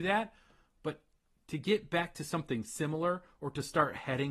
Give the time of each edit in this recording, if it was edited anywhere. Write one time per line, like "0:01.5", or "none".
none